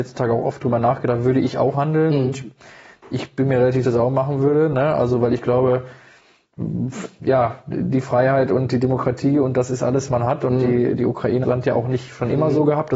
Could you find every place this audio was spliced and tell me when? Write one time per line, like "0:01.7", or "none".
0:01.7
0:03.8
0:10.1
0:11.4